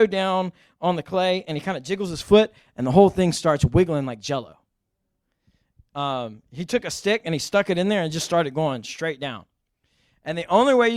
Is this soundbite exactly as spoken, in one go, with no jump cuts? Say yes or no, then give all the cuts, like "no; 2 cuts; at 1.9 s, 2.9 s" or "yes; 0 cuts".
yes; 0 cuts